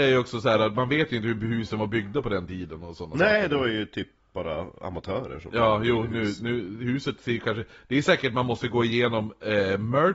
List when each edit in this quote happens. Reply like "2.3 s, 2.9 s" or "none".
none